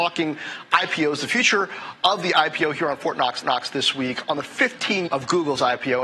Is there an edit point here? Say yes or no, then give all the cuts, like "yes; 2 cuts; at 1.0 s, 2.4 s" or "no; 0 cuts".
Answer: yes; 2 cuts; at 3.4 s, 5.1 s